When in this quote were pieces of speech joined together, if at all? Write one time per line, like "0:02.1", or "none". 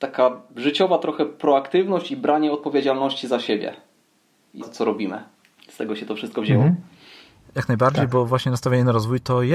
0:04.6